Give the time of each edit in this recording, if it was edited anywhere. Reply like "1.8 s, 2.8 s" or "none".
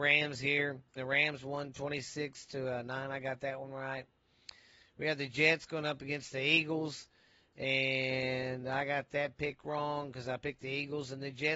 1.0 s

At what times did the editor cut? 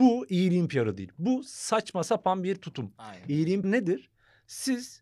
3.6 s

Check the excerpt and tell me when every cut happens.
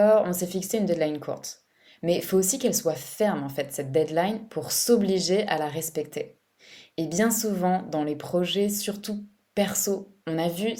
none

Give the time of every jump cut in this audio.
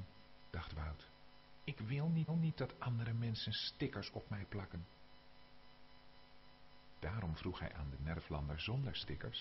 2.3 s

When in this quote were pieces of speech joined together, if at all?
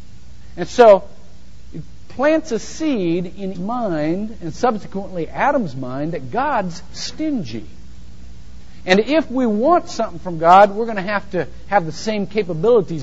3.5 s

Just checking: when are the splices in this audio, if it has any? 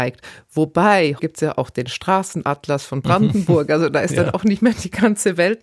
1.2 s

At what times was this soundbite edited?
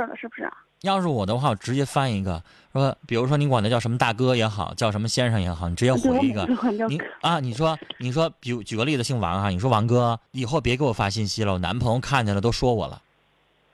3.0 s, 10.3 s

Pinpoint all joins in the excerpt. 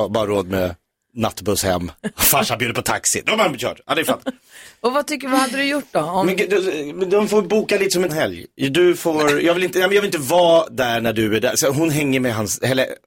8.1 s

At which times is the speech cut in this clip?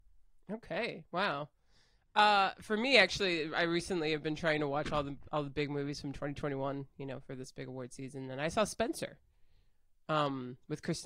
none

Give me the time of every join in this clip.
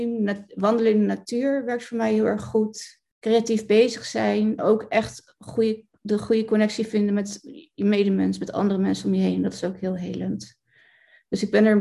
3.1 s, 4.6 s

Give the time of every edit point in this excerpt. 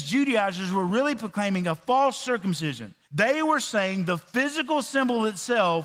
3.0 s

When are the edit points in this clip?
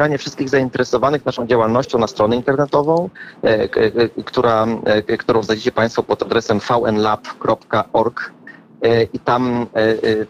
none

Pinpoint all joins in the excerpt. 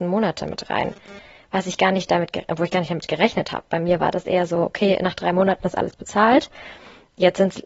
none

